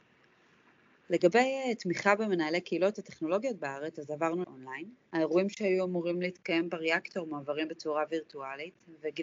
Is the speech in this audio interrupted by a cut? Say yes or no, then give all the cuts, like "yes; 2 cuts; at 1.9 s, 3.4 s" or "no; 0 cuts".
yes; 1 cut; at 4.4 s